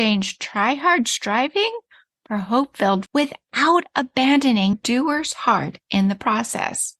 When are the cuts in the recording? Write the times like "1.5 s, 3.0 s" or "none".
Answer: 3.1 s, 4.7 s